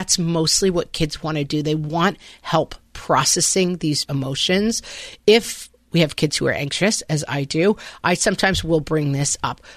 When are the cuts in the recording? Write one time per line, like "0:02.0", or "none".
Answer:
0:04.1